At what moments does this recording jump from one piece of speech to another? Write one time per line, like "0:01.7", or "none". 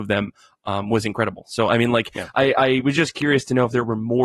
none